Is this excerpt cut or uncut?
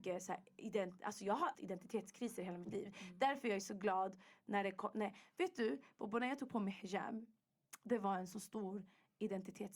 cut